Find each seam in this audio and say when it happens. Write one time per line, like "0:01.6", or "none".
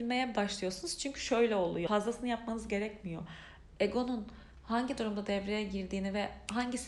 0:01.9